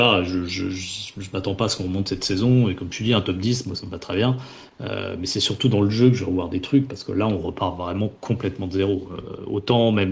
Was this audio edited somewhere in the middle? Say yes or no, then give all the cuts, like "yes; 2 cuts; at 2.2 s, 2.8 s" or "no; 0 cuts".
no; 0 cuts